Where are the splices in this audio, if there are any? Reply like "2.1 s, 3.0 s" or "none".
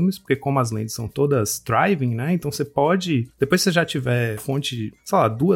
4.4 s